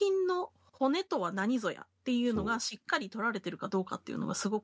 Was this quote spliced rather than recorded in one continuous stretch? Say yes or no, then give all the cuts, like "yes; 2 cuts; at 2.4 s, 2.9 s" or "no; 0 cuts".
no; 0 cuts